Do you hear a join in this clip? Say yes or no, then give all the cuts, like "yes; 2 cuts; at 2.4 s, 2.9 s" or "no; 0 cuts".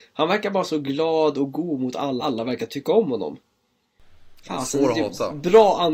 yes; 1 cut; at 2.2 s